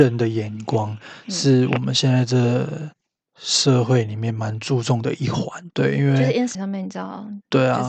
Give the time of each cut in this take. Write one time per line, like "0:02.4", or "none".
0:05.7
0:06.5